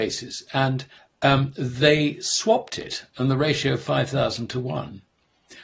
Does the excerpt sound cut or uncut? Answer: cut